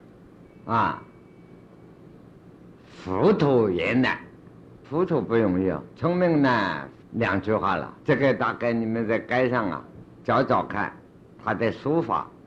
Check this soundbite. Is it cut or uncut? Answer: cut